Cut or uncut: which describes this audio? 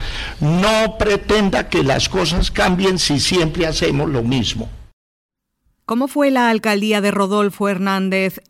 uncut